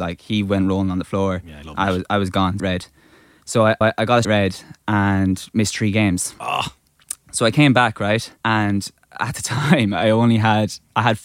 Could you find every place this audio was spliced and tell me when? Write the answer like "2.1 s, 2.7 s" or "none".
1.6 s, 2.6 s, 3.8 s, 4.2 s, 8.4 s